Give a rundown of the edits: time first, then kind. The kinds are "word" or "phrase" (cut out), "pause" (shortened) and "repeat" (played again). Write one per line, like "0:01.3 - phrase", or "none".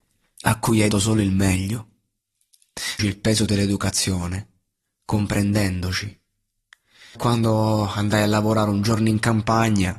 0:00.9 - word
0:03.0 - word
0:07.2 - word